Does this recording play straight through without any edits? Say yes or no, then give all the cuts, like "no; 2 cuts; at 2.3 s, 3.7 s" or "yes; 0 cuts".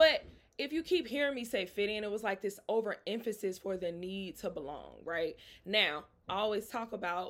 yes; 0 cuts